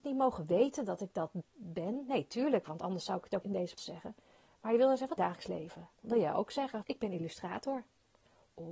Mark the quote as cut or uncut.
cut